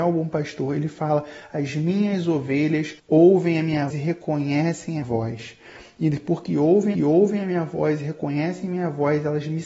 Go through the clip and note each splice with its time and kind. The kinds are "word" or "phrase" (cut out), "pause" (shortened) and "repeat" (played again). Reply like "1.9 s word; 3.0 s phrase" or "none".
3.0 s pause; 3.9 s word; 5.0 s word; 6.9 s repeat

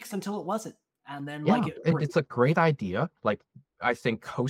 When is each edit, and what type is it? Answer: 3.2 s pause

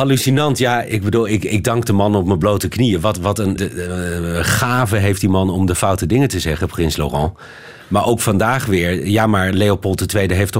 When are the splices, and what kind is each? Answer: 3.6 s word

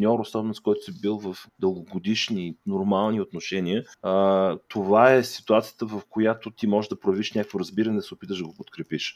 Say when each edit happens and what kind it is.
1.5 s pause; 3.9 s pause

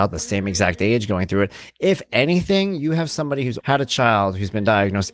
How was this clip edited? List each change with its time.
3.6 s word

